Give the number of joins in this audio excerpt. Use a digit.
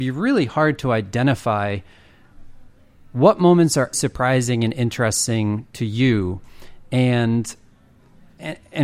1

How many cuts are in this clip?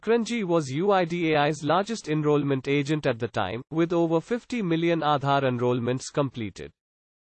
0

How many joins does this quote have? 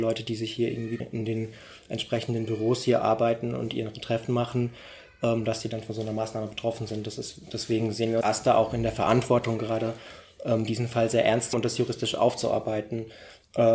3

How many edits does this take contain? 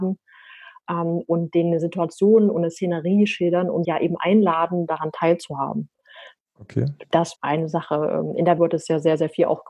3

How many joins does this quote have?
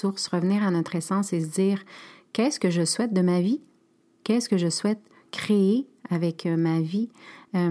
0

